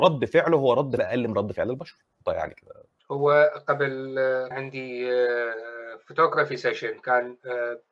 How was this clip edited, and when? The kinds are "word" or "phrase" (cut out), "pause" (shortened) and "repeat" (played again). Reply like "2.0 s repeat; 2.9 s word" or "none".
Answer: 1.0 s word; 2.3 s word; 3.0 s pause; 4.5 s phrase

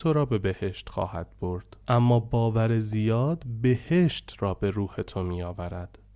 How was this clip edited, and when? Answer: 1.8 s pause

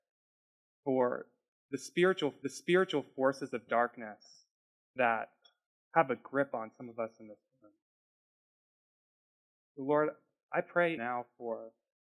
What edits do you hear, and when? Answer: 2.4 s repeat; 11.0 s word

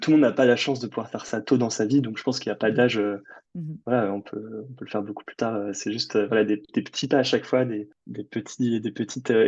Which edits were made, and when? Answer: 3.4 s pause

